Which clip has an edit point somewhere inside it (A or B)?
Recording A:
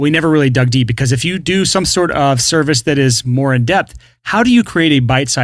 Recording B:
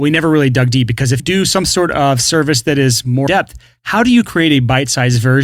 B